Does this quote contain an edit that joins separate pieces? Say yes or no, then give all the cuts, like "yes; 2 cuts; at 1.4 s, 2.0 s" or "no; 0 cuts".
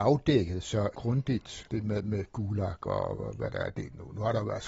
no; 0 cuts